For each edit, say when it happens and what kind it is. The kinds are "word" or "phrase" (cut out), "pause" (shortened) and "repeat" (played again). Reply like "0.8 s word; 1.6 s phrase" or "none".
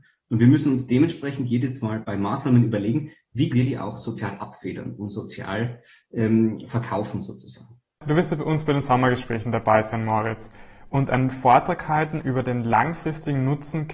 2.0 s word; 3.5 s word